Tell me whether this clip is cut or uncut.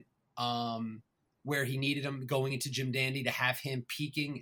uncut